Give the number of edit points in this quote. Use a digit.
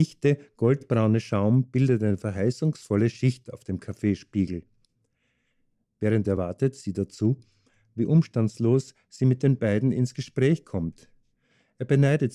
0